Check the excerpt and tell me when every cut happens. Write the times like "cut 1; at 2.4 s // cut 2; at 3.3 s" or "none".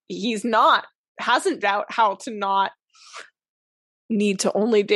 cut 1; at 1.6 s